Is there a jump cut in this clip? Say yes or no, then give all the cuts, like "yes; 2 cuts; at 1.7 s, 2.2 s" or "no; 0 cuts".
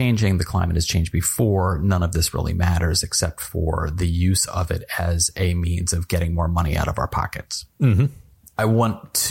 yes; 1 cut; at 7.7 s